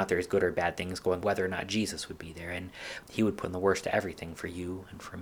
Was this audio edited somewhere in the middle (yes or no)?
yes